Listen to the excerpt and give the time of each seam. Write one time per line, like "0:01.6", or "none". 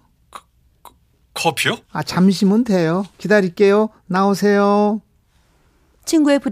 0:01.8
0:03.1